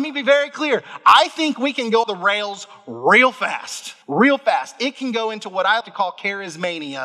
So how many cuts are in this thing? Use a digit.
3